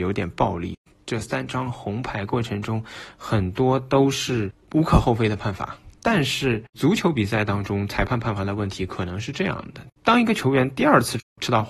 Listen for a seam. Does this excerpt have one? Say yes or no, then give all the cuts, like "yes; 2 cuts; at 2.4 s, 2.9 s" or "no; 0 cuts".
yes; 3 cuts; at 4.6 s, 6.0 s, 10.0 s